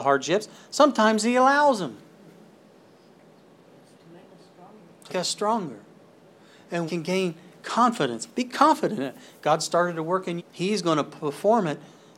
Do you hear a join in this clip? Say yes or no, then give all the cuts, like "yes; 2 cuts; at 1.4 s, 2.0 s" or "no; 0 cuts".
yes; 3 cuts; at 5.1 s, 6.9 s, 10.4 s